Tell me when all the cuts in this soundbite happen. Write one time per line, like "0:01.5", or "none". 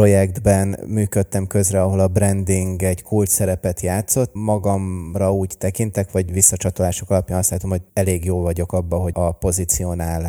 0:04.4
0:07.9
0:09.1